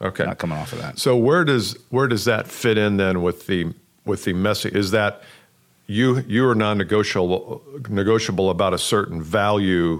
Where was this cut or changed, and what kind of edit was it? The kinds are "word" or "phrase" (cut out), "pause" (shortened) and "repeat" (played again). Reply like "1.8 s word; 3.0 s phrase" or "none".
none